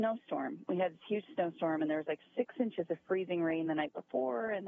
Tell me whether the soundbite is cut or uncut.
uncut